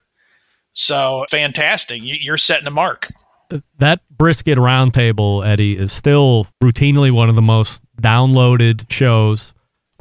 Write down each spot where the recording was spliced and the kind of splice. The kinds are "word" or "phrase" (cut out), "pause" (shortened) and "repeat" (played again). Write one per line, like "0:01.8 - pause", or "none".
0:01.3 - phrase
0:06.5 - pause